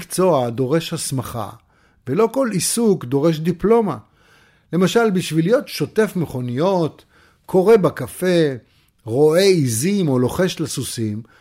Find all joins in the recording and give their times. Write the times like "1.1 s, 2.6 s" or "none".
none